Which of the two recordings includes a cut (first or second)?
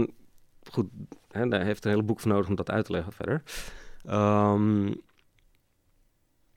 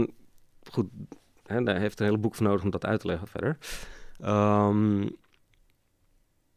first